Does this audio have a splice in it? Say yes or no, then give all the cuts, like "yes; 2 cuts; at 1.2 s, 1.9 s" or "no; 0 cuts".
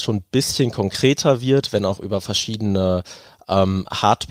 no; 0 cuts